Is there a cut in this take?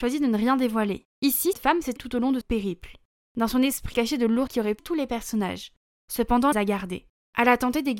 yes; 7 cuts; at 1.5 s, 2.0 s, 2.4 s, 3.9 s, 4.5 s, 4.8 s, 6.5 s

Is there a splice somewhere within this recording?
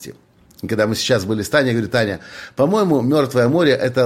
no; 0 cuts

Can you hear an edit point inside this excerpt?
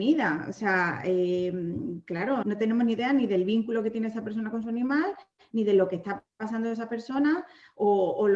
yes; 1 cut; at 2.4 s

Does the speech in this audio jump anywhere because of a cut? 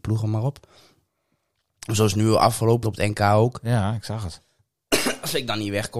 yes; 1 cut; at 2.8 s

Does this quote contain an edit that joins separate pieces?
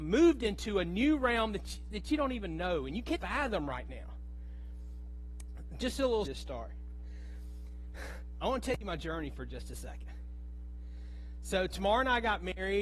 yes; 2 cuts; at 3.2 s, 6.3 s

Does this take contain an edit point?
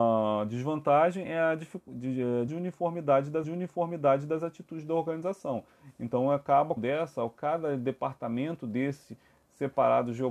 yes; 3 cuts; at 2.5 s, 3.4 s, 6.8 s

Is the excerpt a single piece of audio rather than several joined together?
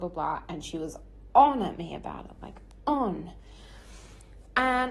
yes; 0 cuts

